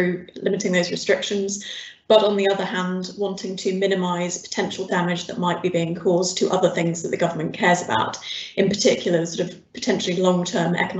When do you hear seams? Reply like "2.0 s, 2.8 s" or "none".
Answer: none

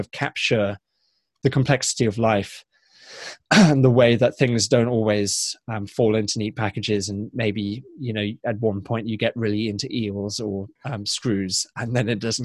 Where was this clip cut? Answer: 10.8 s

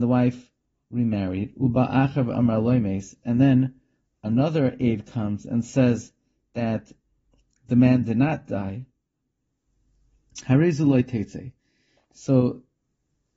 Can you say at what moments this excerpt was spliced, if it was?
none

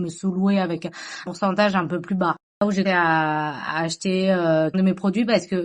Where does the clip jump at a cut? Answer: 1.3 s, 2.8 s, 4.7 s

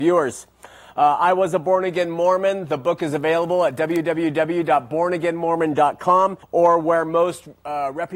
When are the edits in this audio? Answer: 6.4 s

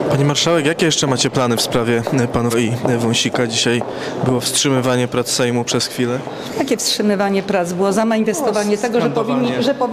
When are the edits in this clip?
2.5 s

